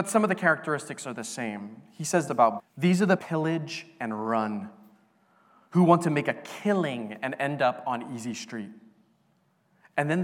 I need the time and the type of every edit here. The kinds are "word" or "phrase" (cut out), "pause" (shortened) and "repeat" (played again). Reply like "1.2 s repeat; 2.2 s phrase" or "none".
2.3 s word; 2.6 s word; 3.2 s phrase